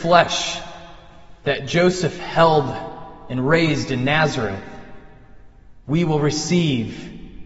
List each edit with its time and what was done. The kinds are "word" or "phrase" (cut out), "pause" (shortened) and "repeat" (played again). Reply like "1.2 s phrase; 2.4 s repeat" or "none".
5.8 s pause